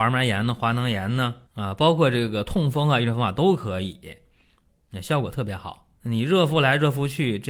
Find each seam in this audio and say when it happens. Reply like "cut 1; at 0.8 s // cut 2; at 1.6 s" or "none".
cut 1; at 1.5 s // cut 2; at 6.0 s